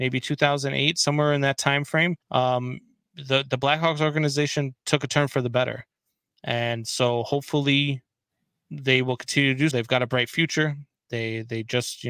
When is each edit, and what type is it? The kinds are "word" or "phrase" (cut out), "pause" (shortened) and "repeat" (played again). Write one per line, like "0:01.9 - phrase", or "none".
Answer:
0:02.2 - pause
0:09.7 - word